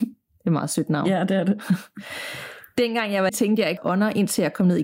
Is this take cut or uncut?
cut